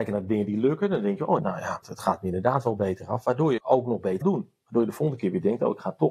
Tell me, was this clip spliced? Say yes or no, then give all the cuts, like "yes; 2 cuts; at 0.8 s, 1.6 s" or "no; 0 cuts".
yes; 4 cuts; at 1.4 s, 1.8 s, 3.6 s, 4.2 s